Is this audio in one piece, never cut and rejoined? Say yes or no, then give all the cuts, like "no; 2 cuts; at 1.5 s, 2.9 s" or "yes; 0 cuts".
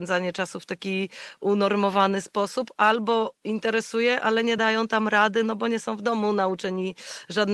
yes; 0 cuts